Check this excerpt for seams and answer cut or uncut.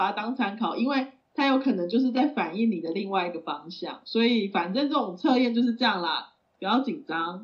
uncut